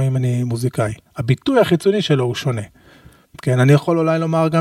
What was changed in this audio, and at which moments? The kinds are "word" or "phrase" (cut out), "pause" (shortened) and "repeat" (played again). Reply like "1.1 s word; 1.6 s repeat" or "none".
1.1 s pause

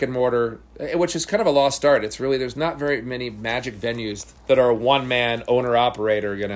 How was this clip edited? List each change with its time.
4.4 s pause

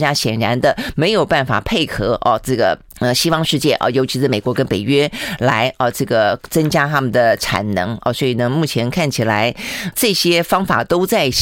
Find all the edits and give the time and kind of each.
2.9 s pause; 9.9 s word

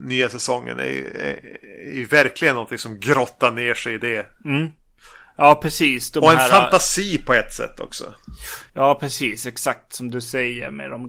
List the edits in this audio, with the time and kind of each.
8.7 s pause

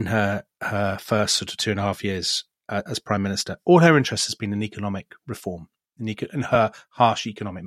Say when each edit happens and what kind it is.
none

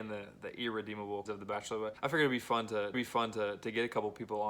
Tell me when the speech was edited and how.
1.3 s word; 2.0 s pause; 2.9 s repeat

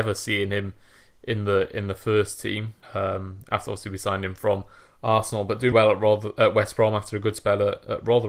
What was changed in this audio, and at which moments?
2.8 s pause; 5.7 s word

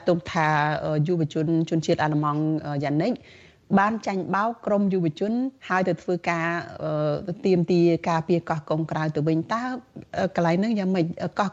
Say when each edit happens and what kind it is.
5.6 s pause

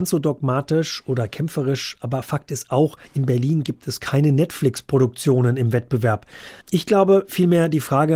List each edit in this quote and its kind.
3.0 s pause; 6.6 s pause

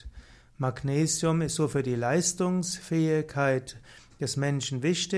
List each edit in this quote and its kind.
none

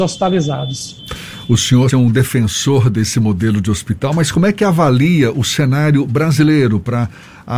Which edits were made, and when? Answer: 1.9 s word

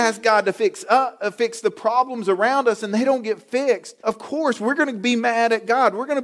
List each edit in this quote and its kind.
4.0 s pause

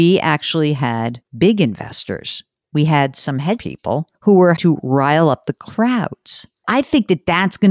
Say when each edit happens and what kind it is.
1.3 s pause; 2.6 s pause; 3.6 s word; 4.1 s pause; 4.6 s word

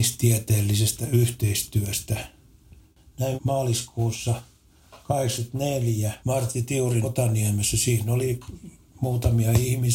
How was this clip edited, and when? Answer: 3.4 s phrase; 6.2 s pause; 7.0 s word

